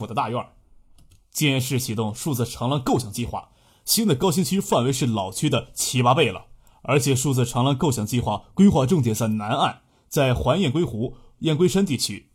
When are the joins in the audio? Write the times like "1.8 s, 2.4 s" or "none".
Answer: none

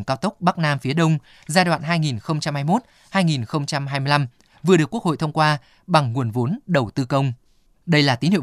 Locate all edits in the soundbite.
none

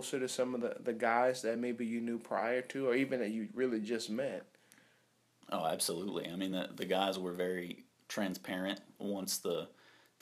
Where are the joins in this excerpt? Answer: none

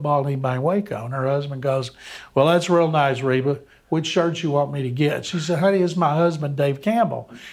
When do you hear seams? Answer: none

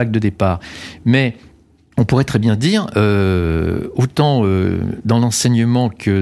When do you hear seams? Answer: none

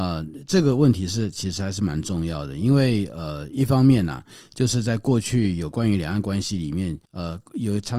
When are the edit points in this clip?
7.0 s

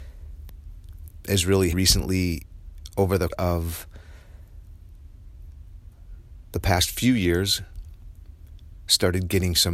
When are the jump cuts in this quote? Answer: 1.7 s, 3.3 s

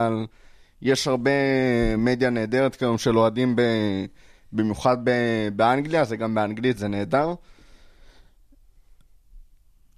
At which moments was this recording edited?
none

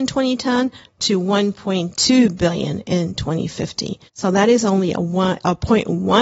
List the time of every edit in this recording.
4.1 s

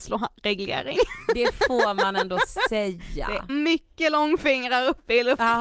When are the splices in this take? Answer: 3.5 s

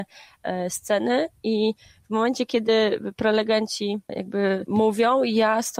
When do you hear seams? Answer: none

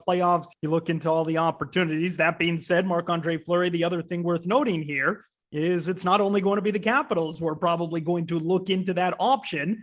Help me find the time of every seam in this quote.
none

